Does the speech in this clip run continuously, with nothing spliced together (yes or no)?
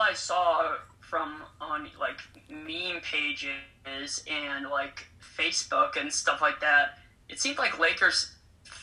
yes